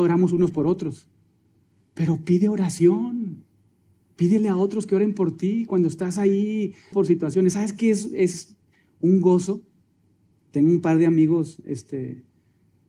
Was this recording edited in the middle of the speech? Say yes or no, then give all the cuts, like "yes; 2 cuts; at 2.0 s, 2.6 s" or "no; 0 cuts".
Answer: yes; 1 cut; at 6.9 s